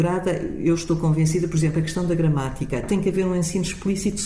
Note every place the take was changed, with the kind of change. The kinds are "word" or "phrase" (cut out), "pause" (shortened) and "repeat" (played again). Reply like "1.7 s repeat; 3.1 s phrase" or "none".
none